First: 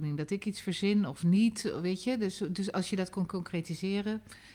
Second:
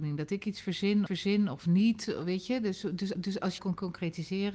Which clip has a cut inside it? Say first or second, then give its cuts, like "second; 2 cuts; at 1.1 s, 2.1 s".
second; 3 cuts; at 1.1 s, 3.1 s, 3.6 s